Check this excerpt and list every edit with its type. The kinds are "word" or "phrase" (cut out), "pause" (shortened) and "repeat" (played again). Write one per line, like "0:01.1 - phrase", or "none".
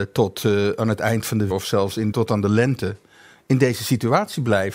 0:01.5 - word
0:02.1 - word